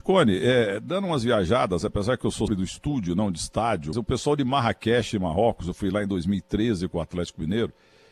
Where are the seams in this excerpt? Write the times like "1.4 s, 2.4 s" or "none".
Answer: 2.5 s, 3.9 s